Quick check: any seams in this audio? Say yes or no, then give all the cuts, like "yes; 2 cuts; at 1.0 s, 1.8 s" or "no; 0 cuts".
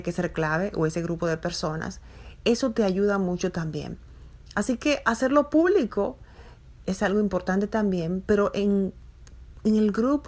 no; 0 cuts